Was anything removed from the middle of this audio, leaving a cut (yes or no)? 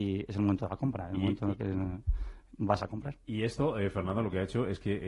no